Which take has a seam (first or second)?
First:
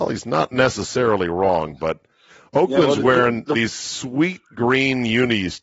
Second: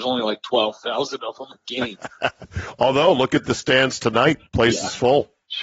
second